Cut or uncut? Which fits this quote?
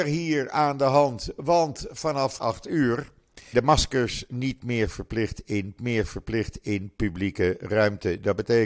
cut